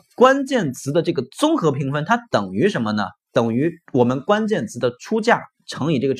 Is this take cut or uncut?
cut